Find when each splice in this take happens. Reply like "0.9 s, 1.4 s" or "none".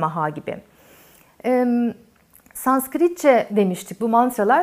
3.5 s

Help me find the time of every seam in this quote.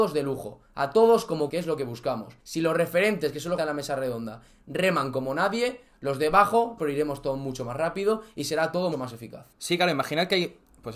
1.5 s, 2.4 s, 3.6 s, 6.8 s, 8.9 s, 9.5 s

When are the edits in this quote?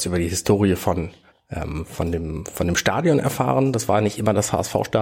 1.3 s

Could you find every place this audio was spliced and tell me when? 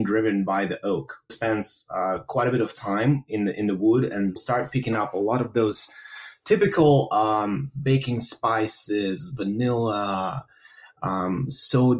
1.3 s, 4.4 s

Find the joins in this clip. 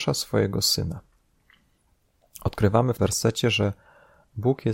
3.0 s

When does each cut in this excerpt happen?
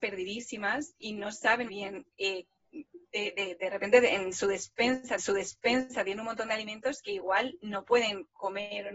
1.7 s, 3.1 s, 5.2 s

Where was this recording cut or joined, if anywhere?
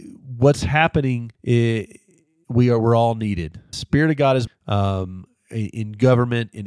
1.3 s, 3.7 s, 4.5 s

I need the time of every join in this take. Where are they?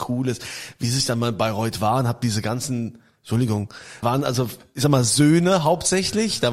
4.0 s

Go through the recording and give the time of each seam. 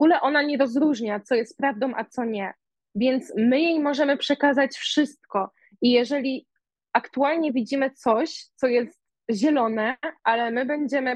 none

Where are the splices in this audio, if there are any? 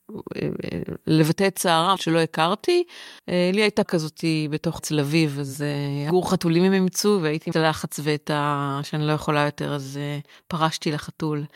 2.0 s, 3.2 s, 3.9 s, 4.8 s, 6.1 s, 7.5 s

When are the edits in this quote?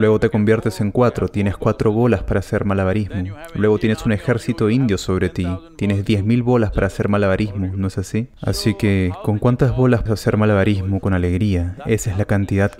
8.4 s, 10.1 s

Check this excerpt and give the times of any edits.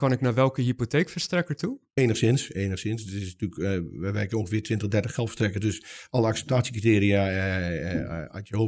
1.9 s

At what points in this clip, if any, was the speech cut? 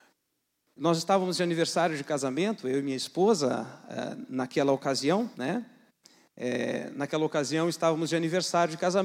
5.3 s

